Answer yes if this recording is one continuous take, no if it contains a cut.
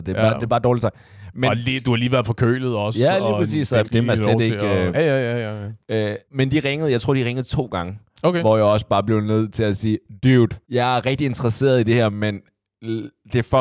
no